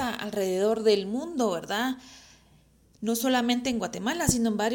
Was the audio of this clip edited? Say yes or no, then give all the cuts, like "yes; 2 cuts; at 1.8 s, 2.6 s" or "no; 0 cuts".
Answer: no; 0 cuts